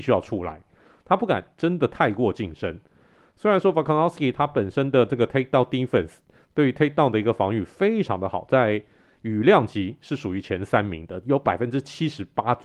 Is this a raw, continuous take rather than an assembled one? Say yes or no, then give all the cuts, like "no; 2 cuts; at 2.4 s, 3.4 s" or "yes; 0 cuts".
yes; 0 cuts